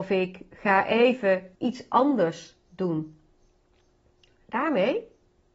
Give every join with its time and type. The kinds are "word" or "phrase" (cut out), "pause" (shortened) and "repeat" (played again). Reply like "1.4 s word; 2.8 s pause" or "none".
1.5 s pause; 2.6 s pause